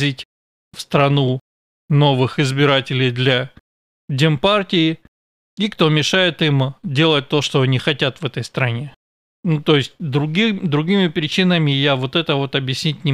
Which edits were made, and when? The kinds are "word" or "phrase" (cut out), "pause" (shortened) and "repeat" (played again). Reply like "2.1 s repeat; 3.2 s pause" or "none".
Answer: none